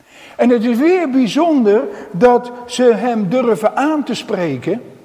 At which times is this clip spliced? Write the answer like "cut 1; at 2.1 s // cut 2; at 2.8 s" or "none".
none